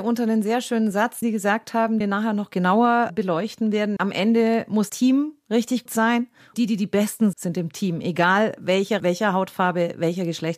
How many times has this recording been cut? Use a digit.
8